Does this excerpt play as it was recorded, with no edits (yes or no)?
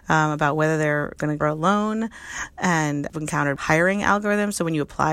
no